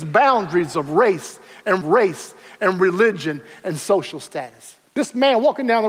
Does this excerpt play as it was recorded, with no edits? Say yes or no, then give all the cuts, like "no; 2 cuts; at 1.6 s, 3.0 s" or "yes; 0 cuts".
no; 2 cuts; at 1.8 s, 4.9 s